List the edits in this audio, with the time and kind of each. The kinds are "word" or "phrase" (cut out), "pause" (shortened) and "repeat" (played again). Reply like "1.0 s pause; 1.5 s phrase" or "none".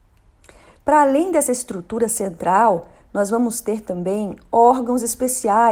none